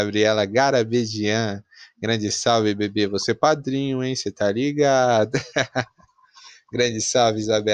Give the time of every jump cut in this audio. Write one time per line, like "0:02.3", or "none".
none